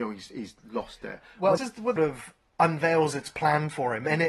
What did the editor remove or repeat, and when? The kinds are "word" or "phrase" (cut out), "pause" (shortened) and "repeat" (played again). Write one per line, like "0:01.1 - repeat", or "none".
0:01.6 - word
0:02.0 - phrase